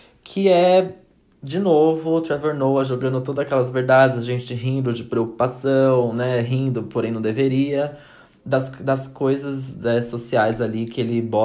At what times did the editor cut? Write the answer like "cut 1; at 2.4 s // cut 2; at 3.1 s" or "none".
none